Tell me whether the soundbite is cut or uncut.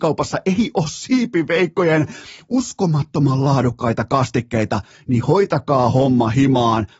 uncut